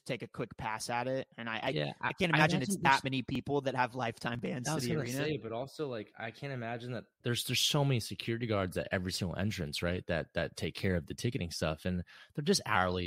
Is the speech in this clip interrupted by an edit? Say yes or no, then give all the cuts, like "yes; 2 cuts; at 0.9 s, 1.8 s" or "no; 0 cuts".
no; 0 cuts